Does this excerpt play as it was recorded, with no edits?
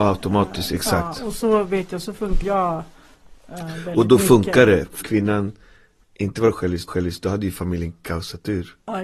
no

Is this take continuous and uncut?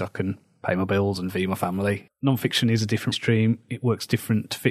no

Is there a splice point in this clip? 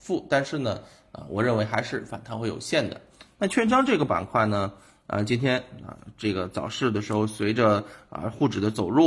no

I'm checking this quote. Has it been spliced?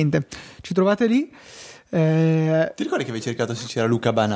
no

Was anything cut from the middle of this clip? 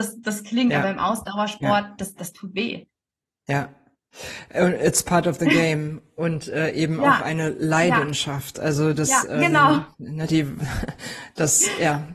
no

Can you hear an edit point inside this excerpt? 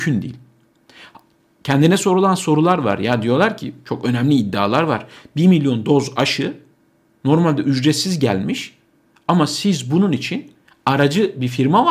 no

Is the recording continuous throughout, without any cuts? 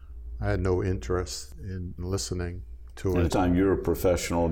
no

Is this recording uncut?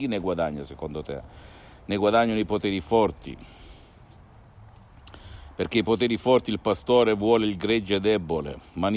yes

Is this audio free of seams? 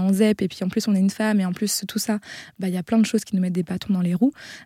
yes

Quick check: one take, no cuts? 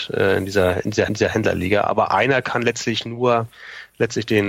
no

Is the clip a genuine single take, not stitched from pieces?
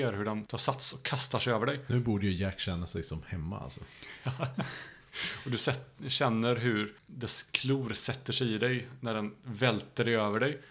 yes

